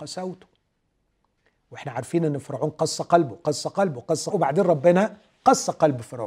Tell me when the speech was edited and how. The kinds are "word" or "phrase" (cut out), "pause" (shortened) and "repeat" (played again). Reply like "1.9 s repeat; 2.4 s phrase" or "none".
4.3 s phrase